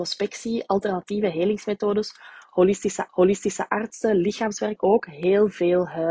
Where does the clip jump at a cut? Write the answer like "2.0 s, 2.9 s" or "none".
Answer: 3.1 s, 4.8 s